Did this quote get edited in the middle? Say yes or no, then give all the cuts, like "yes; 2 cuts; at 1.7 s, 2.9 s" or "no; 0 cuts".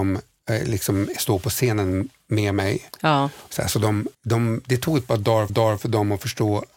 yes; 2 cuts; at 4.1 s, 5.5 s